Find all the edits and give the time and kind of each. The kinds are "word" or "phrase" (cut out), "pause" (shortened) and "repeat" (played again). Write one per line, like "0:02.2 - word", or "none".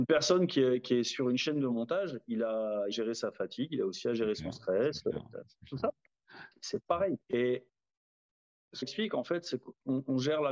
0:02.9 - phrase
0:07.2 - pause
0:08.8 - phrase